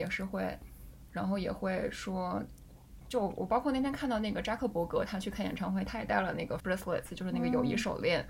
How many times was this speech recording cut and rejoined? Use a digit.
3